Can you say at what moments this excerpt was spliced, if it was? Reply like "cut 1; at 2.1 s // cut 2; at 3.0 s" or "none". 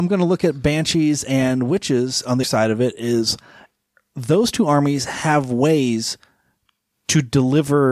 cut 1; at 2.4 s